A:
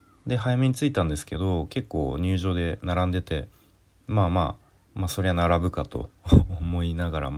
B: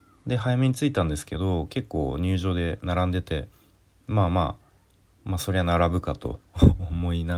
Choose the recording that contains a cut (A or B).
A